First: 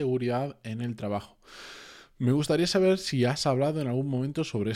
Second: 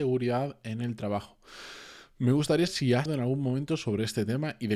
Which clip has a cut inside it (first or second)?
second